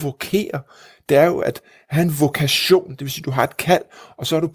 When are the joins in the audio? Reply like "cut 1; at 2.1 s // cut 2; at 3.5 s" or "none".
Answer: none